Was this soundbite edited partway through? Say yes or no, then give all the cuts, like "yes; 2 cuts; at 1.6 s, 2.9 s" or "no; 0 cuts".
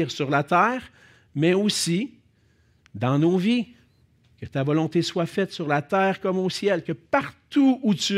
no; 0 cuts